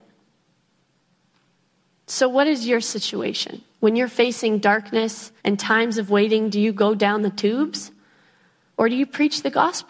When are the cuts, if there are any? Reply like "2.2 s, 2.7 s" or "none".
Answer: 3.7 s, 5.4 s